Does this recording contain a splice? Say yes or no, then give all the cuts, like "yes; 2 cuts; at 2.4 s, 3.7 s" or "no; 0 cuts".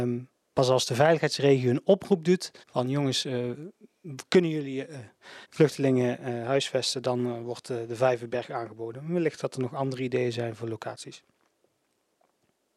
yes; 2 cuts; at 2.6 s, 5.4 s